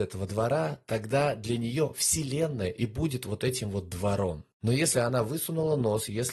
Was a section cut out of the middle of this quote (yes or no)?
yes